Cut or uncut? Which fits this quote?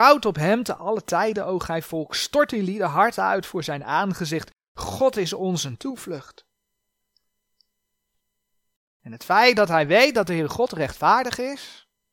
uncut